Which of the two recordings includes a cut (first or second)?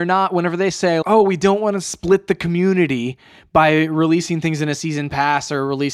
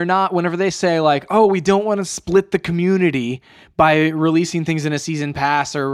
first